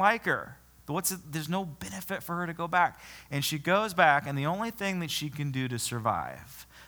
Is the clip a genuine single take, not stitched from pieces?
yes; 0 cuts

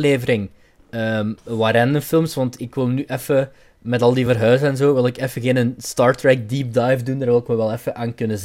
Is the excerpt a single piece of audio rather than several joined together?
yes; 0 cuts

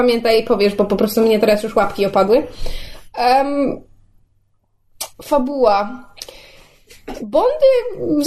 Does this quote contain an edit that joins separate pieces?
yes; 1 cut; at 5.1 s

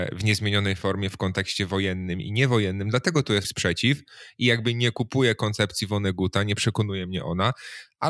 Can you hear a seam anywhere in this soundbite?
yes; 1 cut; at 3.4 s

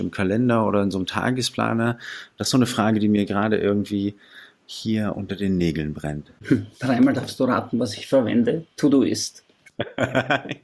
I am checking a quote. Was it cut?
no; 0 cuts

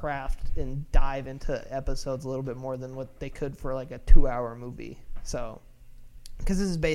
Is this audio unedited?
yes; 0 cuts

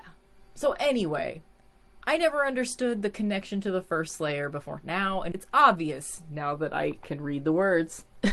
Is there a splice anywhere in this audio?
yes; 1 cut; at 5.3 s

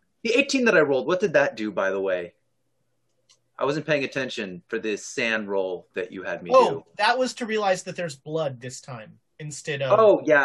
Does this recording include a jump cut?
no; 0 cuts

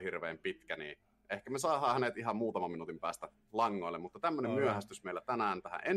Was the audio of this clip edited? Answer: no; 0 cuts

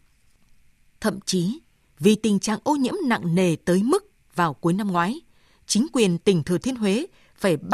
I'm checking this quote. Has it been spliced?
no; 0 cuts

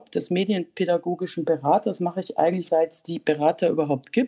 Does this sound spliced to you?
yes; 1 cut; at 2.6 s

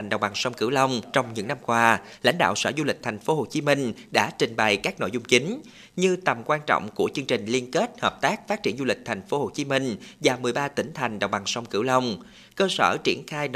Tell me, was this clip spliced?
no; 0 cuts

